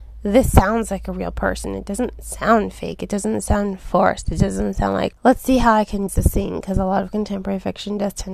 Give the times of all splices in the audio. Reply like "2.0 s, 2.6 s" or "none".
5.1 s, 6.1 s